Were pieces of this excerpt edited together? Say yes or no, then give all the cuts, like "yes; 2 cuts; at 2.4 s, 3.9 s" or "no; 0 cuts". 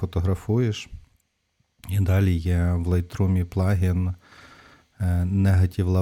no; 0 cuts